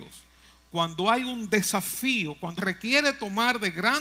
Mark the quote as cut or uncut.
cut